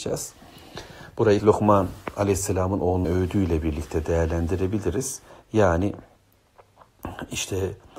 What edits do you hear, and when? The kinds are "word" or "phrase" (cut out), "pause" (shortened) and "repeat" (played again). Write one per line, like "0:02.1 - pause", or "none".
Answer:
0:01.4 - word
0:03.0 - word
0:05.3 - pause